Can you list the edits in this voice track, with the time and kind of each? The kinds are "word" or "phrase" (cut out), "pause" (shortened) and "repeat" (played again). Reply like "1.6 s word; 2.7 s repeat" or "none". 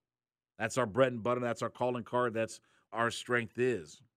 2.9 s word